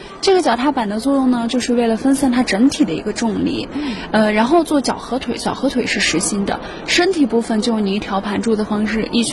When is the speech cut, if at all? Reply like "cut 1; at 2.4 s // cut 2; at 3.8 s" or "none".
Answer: none